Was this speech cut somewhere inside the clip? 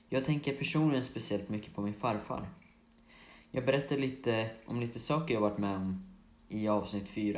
no; 0 cuts

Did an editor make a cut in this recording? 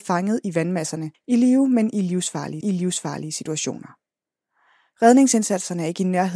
yes; 2 cuts; at 1.1 s, 2.6 s

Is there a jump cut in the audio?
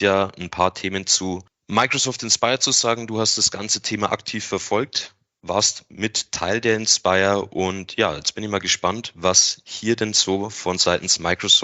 no; 0 cuts

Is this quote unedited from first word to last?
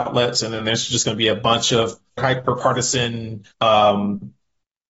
no; 2 cuts; at 2.2 s, 3.5 s

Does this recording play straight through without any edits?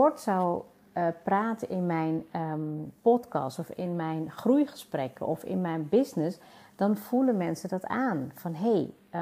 yes; 0 cuts

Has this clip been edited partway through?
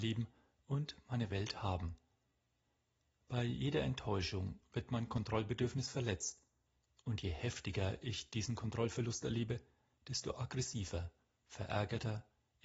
no; 0 cuts

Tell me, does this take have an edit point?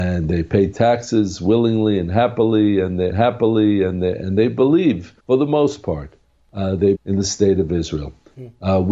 yes; 3 cuts; at 3.1 s, 5.2 s, 6.9 s

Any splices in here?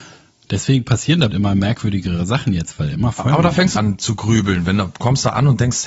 yes; 2 cuts; at 1.3 s, 3.8 s

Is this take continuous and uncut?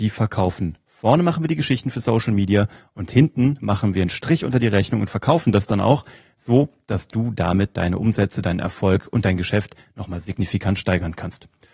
yes; 0 cuts

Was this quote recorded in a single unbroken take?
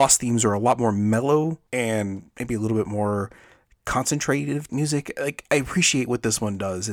no; 2 cuts; at 1.7 s, 4.7 s

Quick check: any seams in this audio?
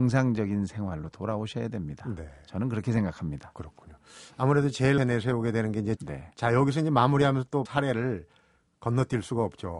yes; 3 cuts; at 5.0 s, 6.0 s, 7.7 s

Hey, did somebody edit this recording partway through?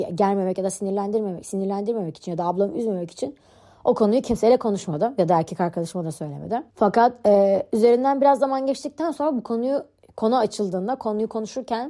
yes; 1 cut; at 6.7 s

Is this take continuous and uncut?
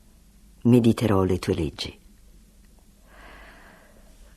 yes; 0 cuts

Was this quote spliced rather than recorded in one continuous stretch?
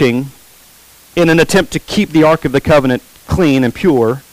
no; 0 cuts

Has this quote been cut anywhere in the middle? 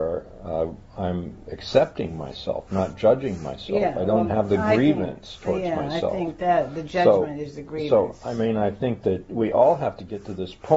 no; 0 cuts

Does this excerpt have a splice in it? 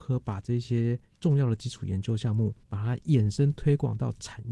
yes; 1 cut; at 2.6 s

